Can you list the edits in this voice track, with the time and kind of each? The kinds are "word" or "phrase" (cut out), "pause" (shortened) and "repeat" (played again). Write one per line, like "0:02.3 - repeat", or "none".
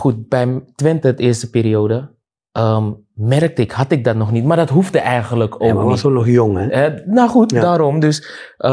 none